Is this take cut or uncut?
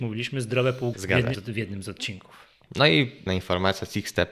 cut